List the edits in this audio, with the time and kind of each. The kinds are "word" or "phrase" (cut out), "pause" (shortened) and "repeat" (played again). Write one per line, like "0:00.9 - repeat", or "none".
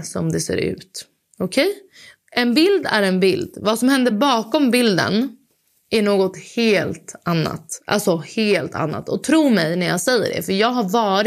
none